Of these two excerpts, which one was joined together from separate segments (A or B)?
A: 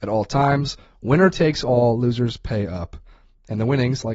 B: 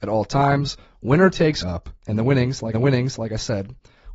B